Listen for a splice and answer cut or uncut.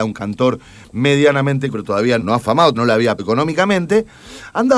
cut